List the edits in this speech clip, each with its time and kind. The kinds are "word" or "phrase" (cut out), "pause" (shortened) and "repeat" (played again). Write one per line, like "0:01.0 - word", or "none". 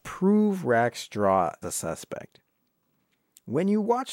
0:01.6 - word